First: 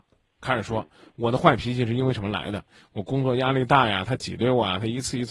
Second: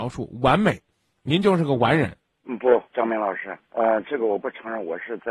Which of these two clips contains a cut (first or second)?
second